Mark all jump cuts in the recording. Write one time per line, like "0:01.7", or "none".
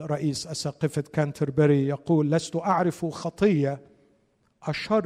none

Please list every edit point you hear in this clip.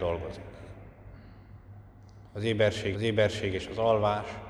0:02.9

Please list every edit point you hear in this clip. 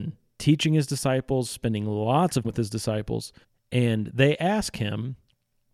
0:02.4
0:03.4

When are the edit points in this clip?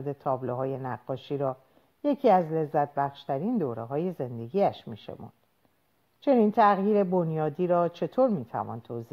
none

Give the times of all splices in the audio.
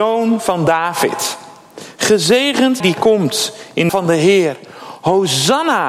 0:02.8
0:03.9

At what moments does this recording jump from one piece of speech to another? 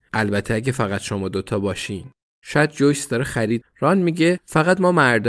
0:03.6

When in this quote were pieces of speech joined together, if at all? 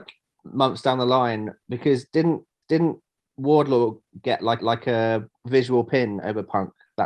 0:02.6
0:04.6

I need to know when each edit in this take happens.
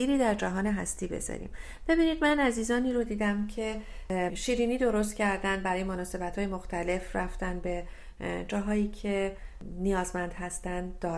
0:04.3

